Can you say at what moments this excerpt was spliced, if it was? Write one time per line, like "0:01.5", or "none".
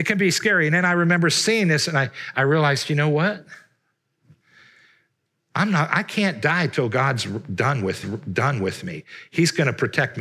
0:08.0